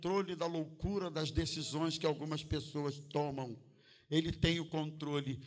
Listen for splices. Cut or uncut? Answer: uncut